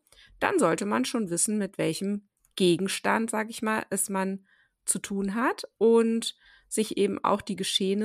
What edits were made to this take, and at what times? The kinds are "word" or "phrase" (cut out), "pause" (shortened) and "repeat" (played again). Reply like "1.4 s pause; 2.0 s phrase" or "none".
none